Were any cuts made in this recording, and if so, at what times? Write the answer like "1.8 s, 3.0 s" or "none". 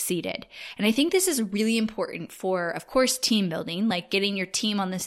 none